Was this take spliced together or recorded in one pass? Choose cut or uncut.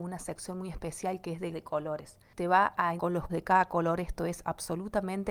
cut